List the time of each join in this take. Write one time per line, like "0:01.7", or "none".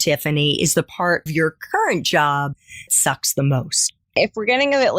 0:01.3
0:02.9